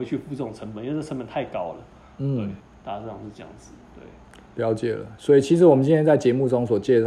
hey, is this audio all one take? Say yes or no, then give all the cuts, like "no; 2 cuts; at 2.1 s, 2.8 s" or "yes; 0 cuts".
no; 1 cut; at 3.8 s